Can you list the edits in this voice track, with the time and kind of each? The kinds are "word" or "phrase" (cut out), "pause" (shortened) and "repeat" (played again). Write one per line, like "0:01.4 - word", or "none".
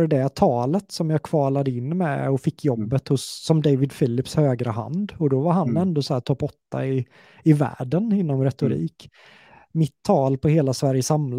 none

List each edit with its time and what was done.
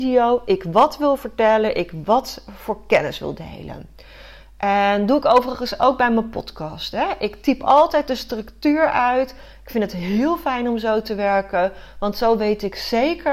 none

